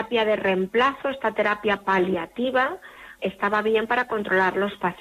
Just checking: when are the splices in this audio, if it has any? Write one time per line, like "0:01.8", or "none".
0:03.2